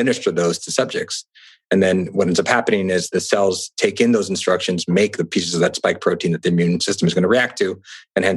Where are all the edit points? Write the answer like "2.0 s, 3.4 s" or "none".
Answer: none